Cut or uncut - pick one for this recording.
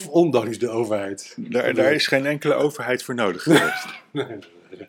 uncut